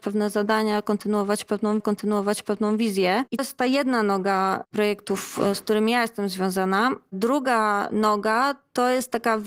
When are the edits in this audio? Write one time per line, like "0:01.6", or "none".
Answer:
0:01.8
0:03.4